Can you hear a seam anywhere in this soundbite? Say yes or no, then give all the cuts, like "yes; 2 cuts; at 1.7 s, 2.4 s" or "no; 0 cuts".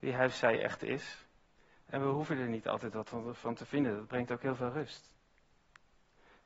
no; 0 cuts